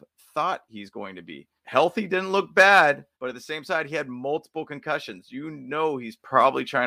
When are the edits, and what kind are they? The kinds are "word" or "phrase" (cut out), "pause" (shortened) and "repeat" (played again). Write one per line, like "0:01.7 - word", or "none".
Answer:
0:01.6 - pause
0:03.1 - pause